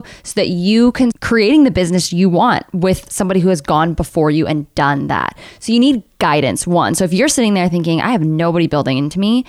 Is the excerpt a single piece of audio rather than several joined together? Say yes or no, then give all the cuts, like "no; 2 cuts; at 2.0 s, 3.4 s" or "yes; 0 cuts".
no; 1 cut; at 1.1 s